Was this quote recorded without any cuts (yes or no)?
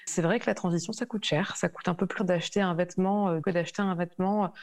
no